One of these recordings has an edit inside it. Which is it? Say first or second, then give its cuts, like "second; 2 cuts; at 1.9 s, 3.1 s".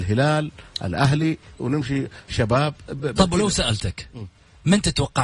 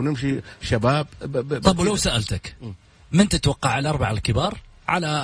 first; 2 cuts; at 1.6 s, 3.0 s